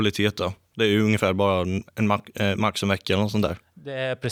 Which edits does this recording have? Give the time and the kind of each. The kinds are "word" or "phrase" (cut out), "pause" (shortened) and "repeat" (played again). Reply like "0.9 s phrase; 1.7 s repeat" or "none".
none